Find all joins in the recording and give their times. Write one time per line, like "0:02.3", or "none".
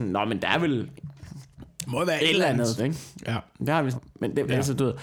0:02.8
0:03.9